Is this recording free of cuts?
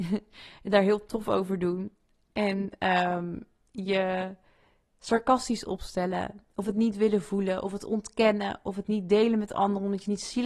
yes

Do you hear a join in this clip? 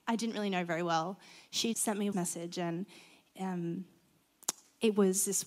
yes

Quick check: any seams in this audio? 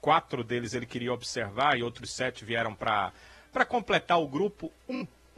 no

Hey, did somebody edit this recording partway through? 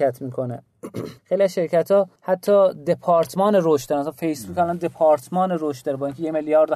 yes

